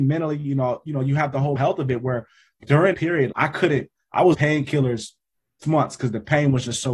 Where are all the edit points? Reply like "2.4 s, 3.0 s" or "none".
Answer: 1.6 s, 2.6 s, 2.9 s, 3.3 s, 4.3 s, 5.6 s